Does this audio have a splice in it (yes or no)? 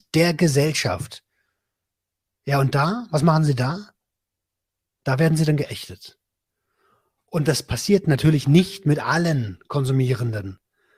no